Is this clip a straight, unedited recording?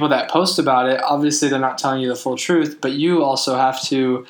yes; 0 cuts

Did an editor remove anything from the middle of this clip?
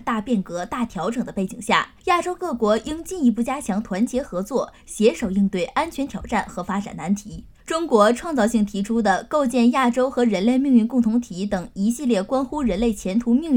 yes; 2 cuts; at 2.0 s, 7.5 s

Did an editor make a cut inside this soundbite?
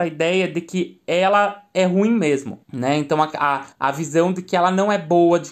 yes; 2 cuts; at 2.6 s, 3.7 s

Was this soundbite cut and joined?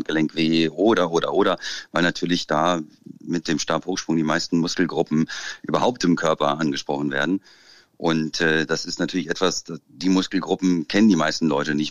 no; 0 cuts

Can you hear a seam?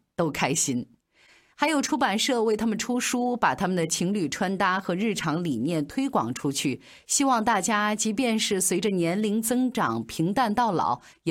no; 0 cuts

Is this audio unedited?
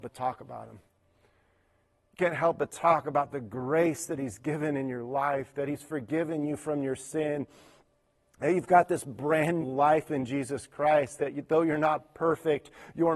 no; 1 cut; at 9.6 s

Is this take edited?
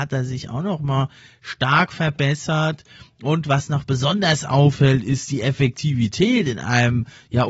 no; 0 cuts

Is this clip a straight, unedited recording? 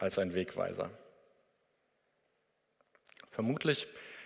yes; 0 cuts

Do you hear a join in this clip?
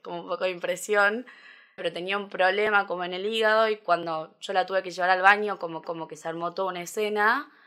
yes; 2 cuts; at 1.8 s, 5.8 s

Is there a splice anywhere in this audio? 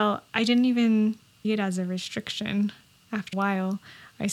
yes; 2 cuts; at 1.4 s, 3.3 s

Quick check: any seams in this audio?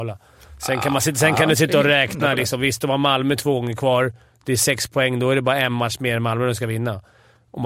no; 0 cuts

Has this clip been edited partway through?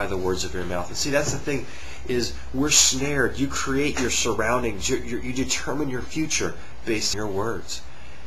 yes; 1 cut; at 7.1 s

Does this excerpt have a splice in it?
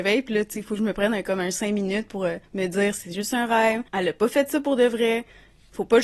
yes; 2 cuts; at 2.4 s, 3.9 s

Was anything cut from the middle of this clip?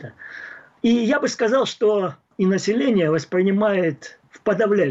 no; 0 cuts

